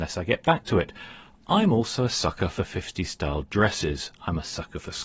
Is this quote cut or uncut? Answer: uncut